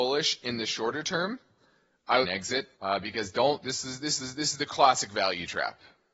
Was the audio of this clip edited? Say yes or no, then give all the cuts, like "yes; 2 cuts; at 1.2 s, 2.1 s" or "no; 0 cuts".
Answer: yes; 3 cuts; at 2.2 s, 2.7 s, 4.2 s